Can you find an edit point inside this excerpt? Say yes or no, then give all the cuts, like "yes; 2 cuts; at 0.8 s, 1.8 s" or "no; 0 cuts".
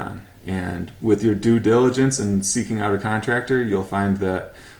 no; 0 cuts